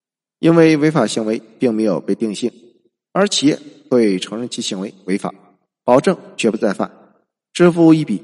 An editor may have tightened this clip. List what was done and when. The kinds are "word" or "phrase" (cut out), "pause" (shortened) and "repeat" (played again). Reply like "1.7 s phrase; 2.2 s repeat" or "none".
none